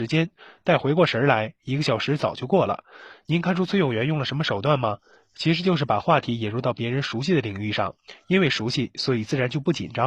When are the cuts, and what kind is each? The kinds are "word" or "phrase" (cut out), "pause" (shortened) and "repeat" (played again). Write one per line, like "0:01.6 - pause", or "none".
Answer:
none